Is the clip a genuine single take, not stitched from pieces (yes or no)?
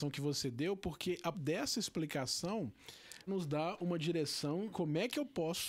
no